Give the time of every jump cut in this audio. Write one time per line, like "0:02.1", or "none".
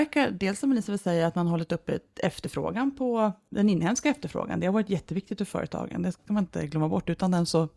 none